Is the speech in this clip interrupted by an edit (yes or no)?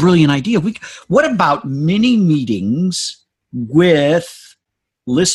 no